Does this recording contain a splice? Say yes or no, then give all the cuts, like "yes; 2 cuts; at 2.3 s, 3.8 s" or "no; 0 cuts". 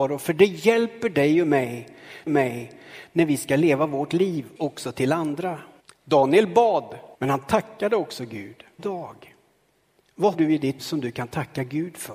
yes; 7 cuts; at 2.3 s, 4.6 s, 5.8 s, 7.1 s, 8.8 s, 10.3 s, 10.8 s